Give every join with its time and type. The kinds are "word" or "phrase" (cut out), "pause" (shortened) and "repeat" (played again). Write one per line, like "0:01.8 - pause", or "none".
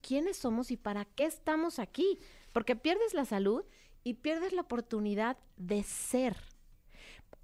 none